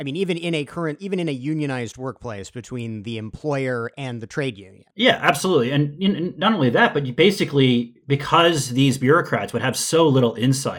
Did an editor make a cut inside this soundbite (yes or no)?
yes